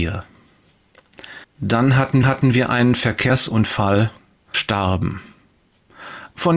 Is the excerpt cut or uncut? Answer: cut